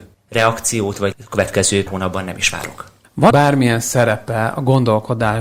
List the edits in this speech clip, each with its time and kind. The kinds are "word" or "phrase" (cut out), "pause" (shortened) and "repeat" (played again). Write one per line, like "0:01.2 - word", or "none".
0:01.1 - word
0:01.9 - word
0:03.3 - word